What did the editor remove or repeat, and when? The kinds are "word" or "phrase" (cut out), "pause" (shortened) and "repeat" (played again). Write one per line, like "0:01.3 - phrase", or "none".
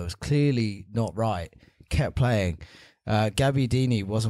none